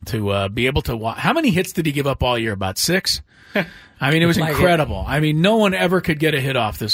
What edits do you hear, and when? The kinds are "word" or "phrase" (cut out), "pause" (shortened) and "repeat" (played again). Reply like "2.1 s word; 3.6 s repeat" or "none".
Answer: 4.3 s word